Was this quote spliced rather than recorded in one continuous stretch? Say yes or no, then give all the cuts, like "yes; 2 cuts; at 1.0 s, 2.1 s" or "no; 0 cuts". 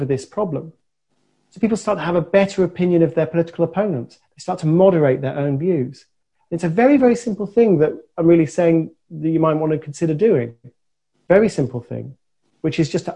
no; 0 cuts